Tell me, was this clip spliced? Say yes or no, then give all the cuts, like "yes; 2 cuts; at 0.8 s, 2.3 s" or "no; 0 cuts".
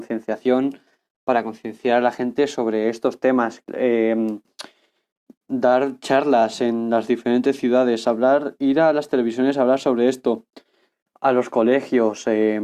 no; 0 cuts